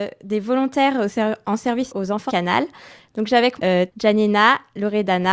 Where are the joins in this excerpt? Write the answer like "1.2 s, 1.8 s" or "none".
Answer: 1.9 s, 2.3 s, 3.6 s, 3.9 s

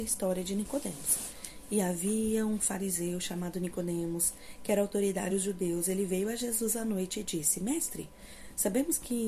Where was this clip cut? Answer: 5.3 s

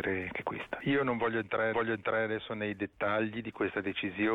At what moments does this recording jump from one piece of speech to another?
1.7 s

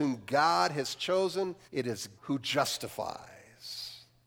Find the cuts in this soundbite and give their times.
1.6 s, 2.2 s

